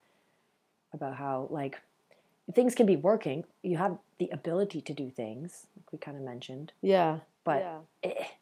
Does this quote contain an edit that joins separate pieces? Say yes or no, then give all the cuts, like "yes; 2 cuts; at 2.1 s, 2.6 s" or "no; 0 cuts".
no; 0 cuts